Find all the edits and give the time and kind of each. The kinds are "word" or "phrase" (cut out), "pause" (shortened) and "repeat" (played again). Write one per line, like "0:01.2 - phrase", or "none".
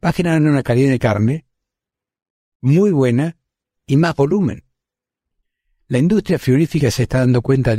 none